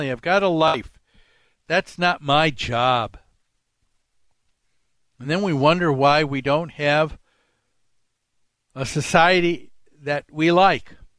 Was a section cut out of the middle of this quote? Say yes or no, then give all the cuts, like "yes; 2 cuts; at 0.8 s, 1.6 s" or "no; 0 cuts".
no; 0 cuts